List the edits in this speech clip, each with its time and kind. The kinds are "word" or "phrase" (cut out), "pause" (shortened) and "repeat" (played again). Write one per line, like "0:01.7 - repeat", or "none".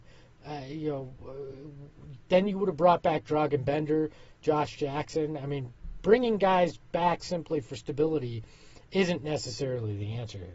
none